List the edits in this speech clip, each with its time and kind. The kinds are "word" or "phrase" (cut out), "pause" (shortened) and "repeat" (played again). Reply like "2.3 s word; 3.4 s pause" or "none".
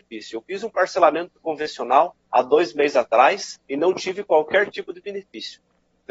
2.2 s pause; 3.6 s pause